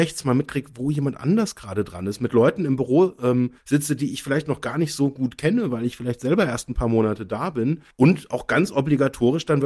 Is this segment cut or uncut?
cut